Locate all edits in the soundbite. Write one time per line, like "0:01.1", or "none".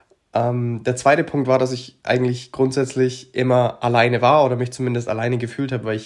none